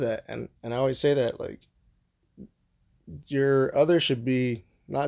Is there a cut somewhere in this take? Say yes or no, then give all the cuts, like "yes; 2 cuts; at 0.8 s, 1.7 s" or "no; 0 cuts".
no; 0 cuts